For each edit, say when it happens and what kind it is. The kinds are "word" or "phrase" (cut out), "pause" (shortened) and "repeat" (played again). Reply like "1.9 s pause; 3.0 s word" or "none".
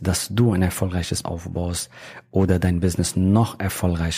1.2 s word